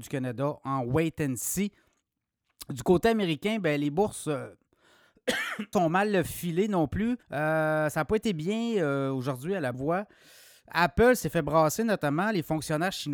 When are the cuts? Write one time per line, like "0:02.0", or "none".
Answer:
0:05.7
0:07.2
0:09.7